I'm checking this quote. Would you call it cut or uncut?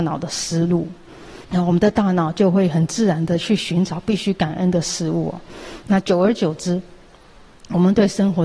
cut